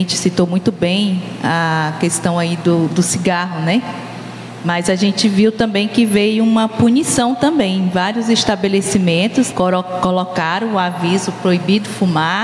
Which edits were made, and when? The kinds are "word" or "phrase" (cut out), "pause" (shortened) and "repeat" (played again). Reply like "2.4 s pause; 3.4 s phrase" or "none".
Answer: 9.5 s word